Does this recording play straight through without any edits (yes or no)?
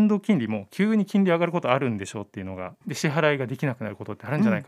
no